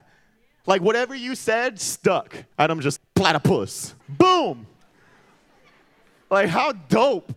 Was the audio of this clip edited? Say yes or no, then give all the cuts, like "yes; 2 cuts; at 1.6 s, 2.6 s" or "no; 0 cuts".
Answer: yes; 3 cuts; at 2.5 s, 3.0 s, 4.0 s